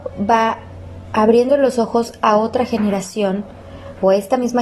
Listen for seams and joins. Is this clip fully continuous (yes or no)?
yes